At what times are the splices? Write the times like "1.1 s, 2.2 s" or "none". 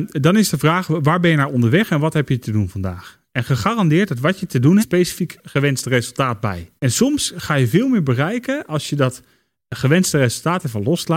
4.8 s, 6.8 s